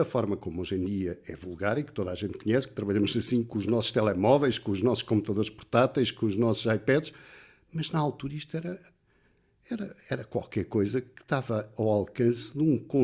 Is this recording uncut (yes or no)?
yes